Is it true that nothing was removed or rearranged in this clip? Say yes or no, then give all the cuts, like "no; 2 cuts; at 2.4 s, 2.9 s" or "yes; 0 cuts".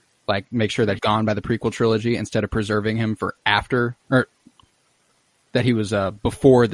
no; 2 cuts; at 1.0 s, 4.0 s